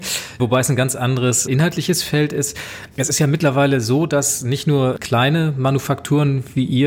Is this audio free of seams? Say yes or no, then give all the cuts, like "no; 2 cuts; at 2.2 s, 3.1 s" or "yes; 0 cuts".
yes; 0 cuts